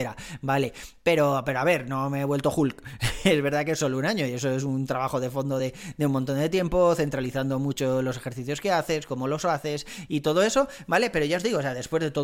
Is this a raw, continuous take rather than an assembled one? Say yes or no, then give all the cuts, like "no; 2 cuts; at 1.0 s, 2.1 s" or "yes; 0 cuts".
yes; 0 cuts